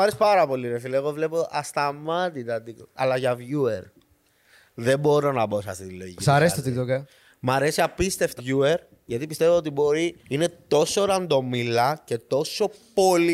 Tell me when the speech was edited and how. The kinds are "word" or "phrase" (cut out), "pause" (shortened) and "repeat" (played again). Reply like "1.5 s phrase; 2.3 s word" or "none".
8.4 s word; 10.2 s pause

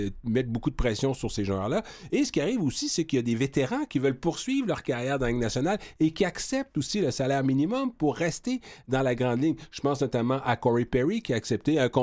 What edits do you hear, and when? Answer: none

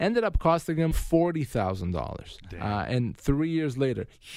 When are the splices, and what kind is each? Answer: 0.9 s word

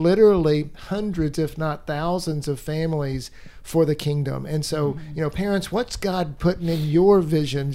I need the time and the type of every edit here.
none

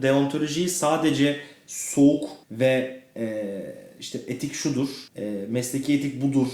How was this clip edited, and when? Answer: 2.4 s pause; 5.1 s pause

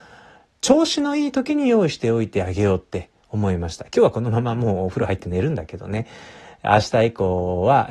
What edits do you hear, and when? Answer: none

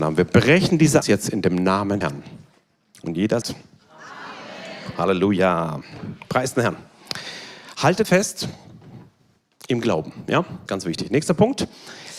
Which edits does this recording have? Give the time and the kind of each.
1.0 s word; 2.0 s word; 3.4 s word; 8.0 s word; 10.7 s word

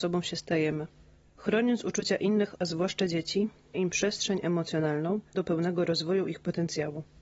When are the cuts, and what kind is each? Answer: 2.5 s word; 3.7 s word; 5.3 s word

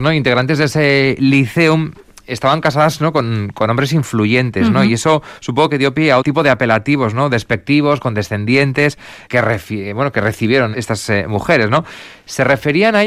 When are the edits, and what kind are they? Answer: 6.2 s word; 9.3 s word; 10.7 s word

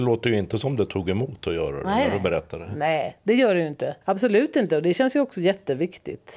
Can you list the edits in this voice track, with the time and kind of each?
4.0 s pause

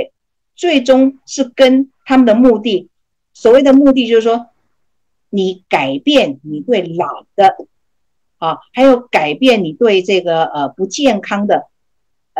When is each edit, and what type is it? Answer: none

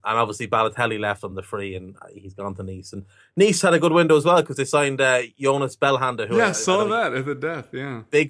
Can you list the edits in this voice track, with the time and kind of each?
none

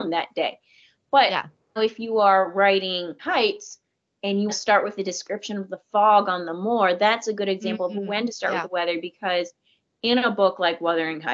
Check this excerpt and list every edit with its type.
1.8 s word; 3.2 s word; 4.5 s word

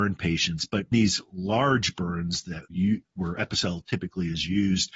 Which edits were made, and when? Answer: 0.9 s word; 2.7 s word

